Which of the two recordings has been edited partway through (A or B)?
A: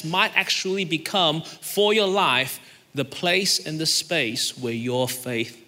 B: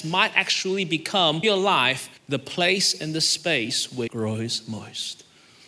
B